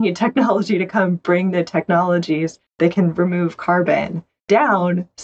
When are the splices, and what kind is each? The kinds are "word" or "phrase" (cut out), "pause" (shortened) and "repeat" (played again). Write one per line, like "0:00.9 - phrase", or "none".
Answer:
0:02.7 - pause